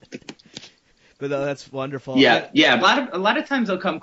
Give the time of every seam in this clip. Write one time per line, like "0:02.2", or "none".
0:02.8